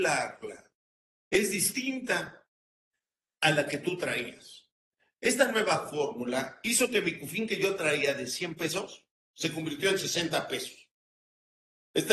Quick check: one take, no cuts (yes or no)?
yes